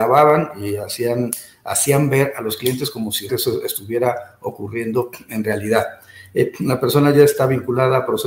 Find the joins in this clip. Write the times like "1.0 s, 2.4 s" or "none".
3.3 s